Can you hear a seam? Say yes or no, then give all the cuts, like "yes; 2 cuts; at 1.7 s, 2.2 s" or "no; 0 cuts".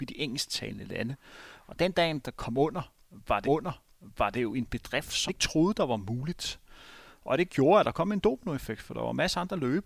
yes; 2 cuts; at 3.4 s, 5.3 s